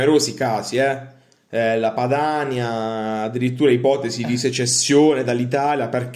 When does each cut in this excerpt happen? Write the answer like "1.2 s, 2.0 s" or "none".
none